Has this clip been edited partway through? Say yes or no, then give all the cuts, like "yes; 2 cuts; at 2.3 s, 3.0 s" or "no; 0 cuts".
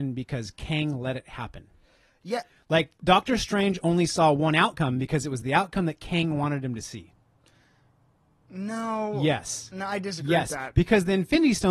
no; 0 cuts